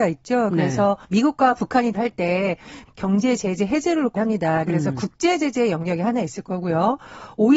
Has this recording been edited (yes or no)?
yes